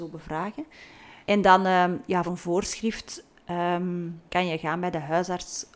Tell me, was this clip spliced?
yes; 3 cuts; at 1.2 s, 2.2 s, 4.3 s

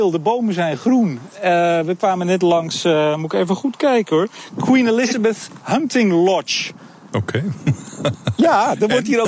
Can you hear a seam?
no; 0 cuts

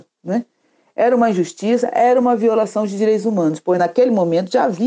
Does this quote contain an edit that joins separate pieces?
no; 0 cuts

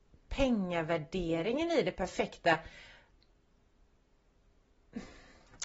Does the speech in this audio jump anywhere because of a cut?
no; 0 cuts

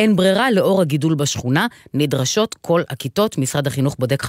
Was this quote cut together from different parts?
no; 0 cuts

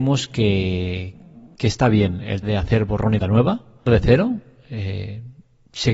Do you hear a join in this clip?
yes; 3 cuts; at 2.4 s, 3.2 s, 3.9 s

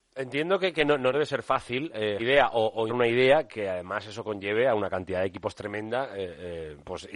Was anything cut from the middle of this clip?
yes; 3 cuts; at 1.1 s, 2.2 s, 2.9 s

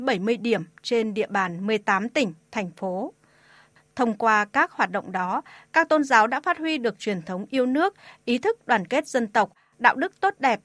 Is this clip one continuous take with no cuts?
yes; 0 cuts

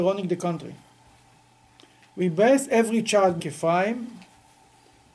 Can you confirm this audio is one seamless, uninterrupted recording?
no; 1 cut; at 3.4 s

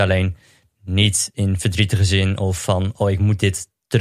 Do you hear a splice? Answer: no; 0 cuts

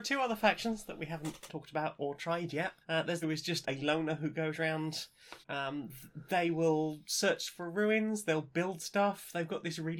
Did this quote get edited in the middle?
yes; 5 cuts; at 1.5 s, 2.8 s, 3.2 s, 3.6 s, 5.4 s

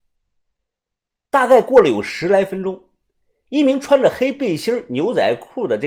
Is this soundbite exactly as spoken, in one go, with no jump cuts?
yes; 0 cuts

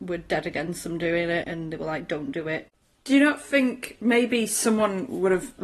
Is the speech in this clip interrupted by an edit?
yes; 1 cut; at 1.4 s

